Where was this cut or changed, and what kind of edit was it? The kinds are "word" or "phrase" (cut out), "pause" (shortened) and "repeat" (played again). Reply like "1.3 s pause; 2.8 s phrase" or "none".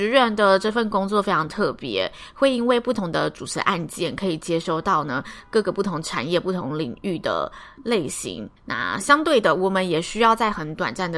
8.6 s pause